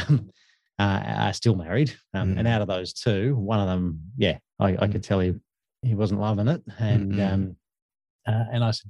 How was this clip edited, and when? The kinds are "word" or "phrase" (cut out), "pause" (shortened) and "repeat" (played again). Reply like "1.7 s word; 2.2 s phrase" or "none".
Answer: none